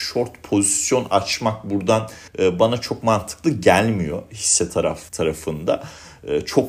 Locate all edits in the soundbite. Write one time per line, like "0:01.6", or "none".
0:02.3
0:05.1